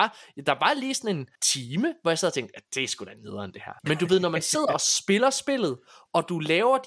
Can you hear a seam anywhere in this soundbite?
yes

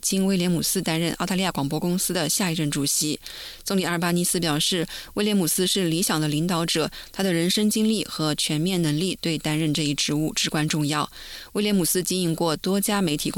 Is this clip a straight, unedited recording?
yes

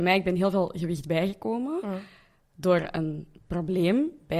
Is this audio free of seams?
yes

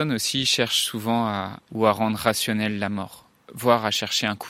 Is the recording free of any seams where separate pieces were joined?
no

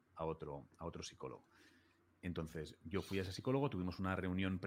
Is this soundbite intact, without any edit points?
yes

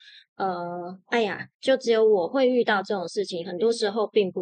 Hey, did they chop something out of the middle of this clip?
yes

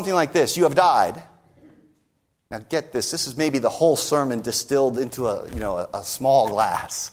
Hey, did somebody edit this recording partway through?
no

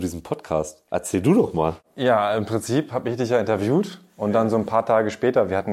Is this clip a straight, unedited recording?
yes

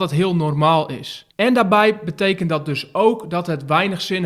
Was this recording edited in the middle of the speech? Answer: yes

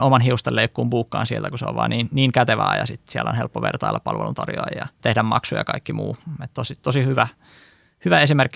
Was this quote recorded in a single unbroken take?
no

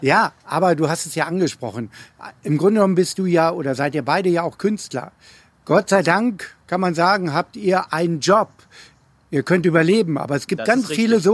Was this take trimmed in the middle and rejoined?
no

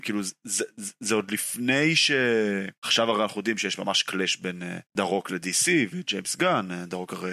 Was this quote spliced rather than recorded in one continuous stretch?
yes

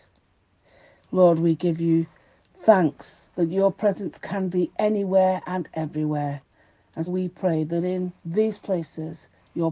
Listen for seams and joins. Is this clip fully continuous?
no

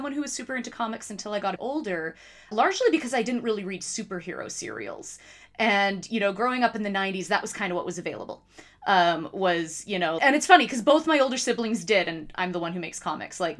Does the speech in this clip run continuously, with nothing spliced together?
no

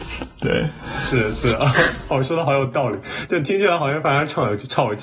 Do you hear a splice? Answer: no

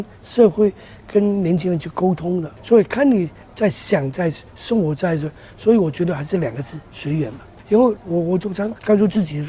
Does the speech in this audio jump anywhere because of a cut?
no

